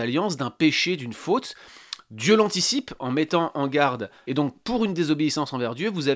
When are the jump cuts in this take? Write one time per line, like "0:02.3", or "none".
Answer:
0:04.3